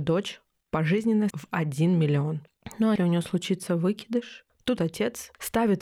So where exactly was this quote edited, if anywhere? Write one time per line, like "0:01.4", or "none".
0:01.3
0:03.0
0:04.8